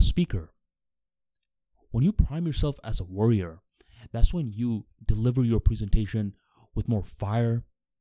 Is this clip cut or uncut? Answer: uncut